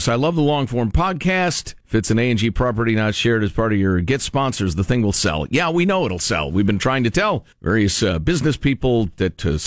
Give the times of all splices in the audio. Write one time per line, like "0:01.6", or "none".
0:01.8
0:07.5